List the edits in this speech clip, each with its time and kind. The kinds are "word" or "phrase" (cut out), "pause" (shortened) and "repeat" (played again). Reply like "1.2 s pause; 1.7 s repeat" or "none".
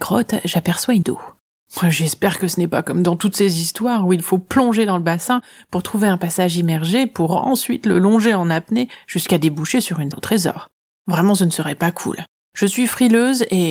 1.0 s word; 10.1 s word